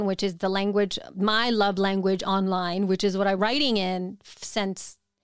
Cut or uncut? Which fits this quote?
cut